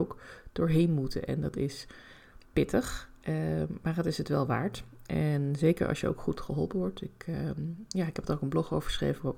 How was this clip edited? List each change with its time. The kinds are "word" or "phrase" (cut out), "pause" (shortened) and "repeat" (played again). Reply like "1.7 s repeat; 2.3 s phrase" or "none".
2.4 s pause